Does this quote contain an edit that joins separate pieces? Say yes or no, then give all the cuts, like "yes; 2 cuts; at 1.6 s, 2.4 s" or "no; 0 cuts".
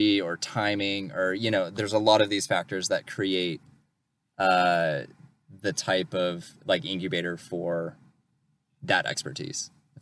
no; 0 cuts